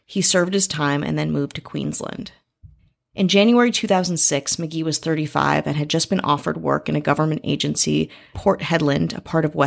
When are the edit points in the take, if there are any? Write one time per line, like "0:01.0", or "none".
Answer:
0:02.8
0:08.3